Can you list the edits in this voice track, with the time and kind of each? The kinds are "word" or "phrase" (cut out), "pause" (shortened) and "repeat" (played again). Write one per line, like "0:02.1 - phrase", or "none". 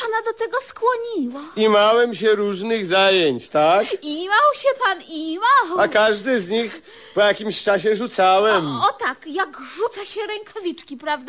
none